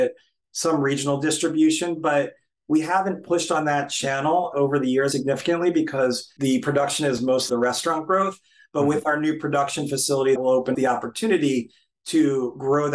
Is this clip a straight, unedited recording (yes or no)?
no